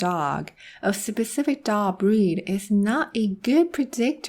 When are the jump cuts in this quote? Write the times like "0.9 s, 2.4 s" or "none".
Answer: none